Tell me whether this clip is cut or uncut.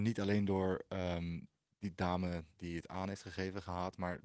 cut